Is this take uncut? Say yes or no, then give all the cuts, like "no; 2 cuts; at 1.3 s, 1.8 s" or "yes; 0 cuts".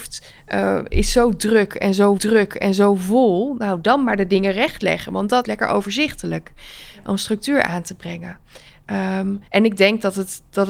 no; 3 cuts; at 2.2 s, 5.4 s, 9.5 s